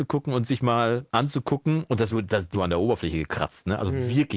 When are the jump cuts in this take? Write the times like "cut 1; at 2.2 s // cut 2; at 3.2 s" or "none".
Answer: cut 1; at 1.1 s // cut 2; at 2.1 s // cut 3; at 2.5 s